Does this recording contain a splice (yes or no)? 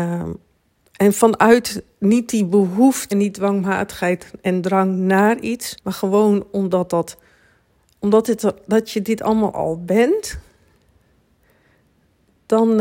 yes